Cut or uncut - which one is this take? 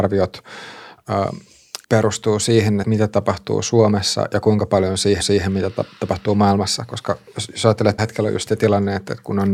cut